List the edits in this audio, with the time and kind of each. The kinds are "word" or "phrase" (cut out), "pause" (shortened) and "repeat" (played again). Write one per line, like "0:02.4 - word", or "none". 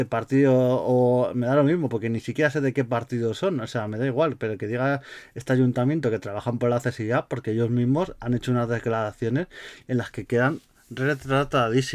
none